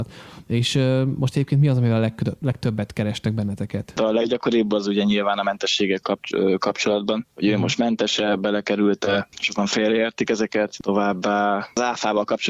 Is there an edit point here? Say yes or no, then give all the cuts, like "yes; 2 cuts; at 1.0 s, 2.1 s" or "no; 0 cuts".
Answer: no; 0 cuts